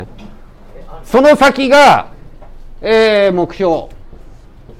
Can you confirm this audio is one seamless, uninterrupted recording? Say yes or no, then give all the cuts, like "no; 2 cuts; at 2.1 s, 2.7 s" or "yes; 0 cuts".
yes; 0 cuts